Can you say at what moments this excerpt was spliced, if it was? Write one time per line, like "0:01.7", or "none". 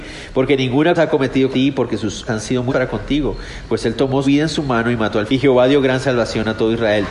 0:01.0
0:01.5
0:02.3
0:02.7
0:04.2
0:05.3